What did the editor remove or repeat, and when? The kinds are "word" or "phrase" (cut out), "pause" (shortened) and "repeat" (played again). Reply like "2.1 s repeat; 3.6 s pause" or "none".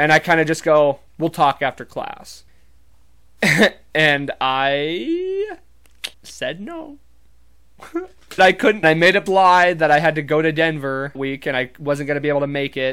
1.1 s pause; 2.5 s pause; 6.1 s pause; 8.4 s phrase; 8.8 s phrase; 9.3 s word; 11.1 s word